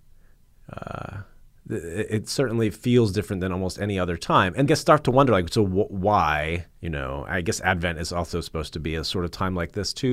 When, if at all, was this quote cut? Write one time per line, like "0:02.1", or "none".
0:01.5
0:04.7
0:06.7